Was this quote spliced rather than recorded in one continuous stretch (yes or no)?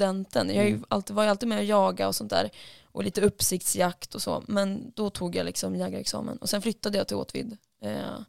no